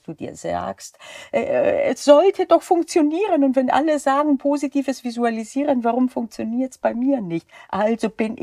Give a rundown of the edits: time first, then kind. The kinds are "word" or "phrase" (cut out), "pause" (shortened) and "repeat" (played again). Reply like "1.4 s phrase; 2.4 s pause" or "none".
none